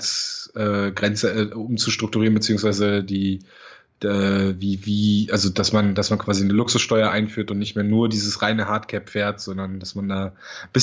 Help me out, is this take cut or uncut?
uncut